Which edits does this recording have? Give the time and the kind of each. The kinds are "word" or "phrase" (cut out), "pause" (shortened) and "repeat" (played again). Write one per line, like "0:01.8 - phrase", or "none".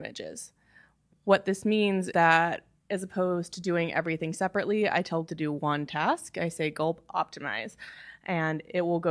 0:02.1 - word
0:05.3 - word